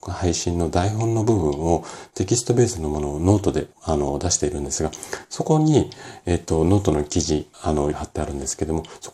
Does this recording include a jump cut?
yes; 3 cuts; at 3.7 s, 7.5 s, 7.9 s

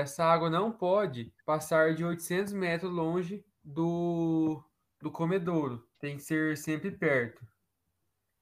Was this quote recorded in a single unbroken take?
no; 3 cuts; at 1.4 s, 3.5 s, 5.9 s

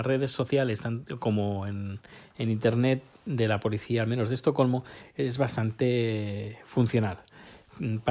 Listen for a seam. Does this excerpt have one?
no; 0 cuts

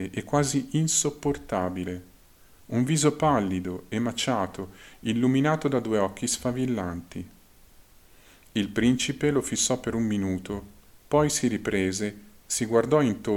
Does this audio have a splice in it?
no; 0 cuts

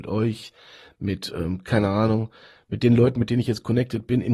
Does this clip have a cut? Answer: no; 0 cuts

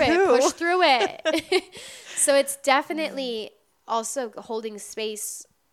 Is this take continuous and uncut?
yes; 0 cuts

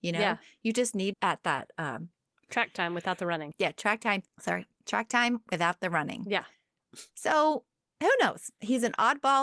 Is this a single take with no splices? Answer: no; 1 cut; at 1.1 s

